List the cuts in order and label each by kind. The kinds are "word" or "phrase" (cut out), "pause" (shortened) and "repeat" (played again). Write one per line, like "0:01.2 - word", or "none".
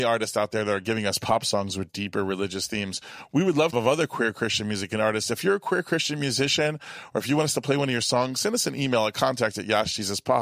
0:03.7 - phrase

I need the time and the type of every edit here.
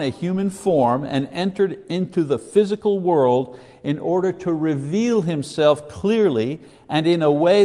none

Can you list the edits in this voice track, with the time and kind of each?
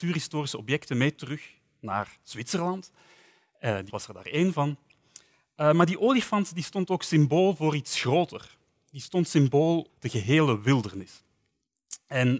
0:03.9 - word
0:09.9 - word

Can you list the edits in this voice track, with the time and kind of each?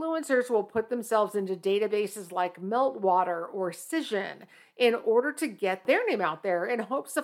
none

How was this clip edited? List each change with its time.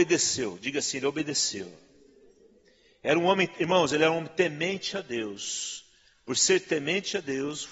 none

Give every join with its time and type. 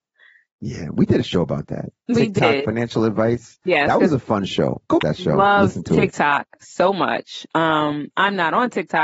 0:05.0 - phrase

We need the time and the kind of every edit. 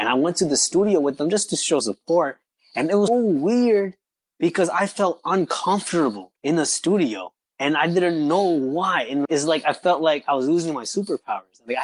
0:01.8 - word
0:03.1 - word
0:06.4 - pause
0:07.4 - pause
0:09.2 - word

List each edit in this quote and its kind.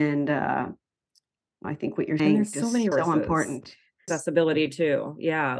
0:01.6 - word
0:02.2 - word
0:02.9 - word

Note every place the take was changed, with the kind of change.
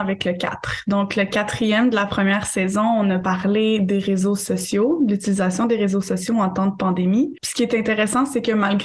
none

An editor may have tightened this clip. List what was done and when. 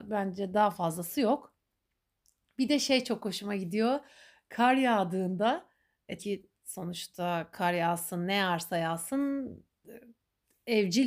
0:06.2 - word

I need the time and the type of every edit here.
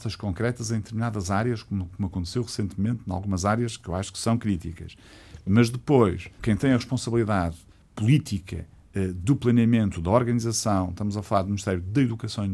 0:06.3 - pause
0:07.7 - pause

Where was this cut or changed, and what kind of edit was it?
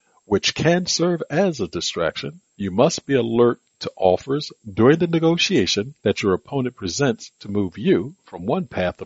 0:02.5 - pause
0:06.0 - pause

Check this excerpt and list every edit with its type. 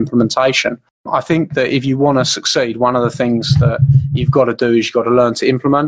0:00.9 - pause

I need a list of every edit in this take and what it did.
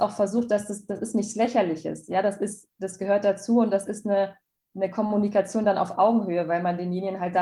none

